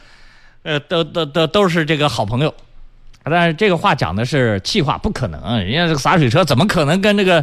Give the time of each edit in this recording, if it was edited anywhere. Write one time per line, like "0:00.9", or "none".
none